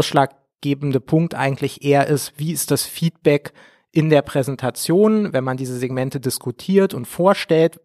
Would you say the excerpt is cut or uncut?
uncut